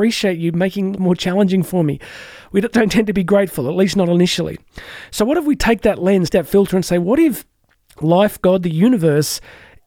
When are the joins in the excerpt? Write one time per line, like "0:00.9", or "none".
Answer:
0:01.0
0:02.7
0:06.3